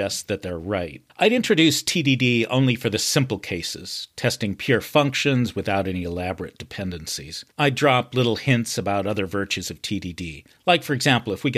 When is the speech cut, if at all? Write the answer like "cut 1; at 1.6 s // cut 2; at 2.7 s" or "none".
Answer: cut 1; at 1.1 s // cut 2; at 7.5 s // cut 3; at 10.6 s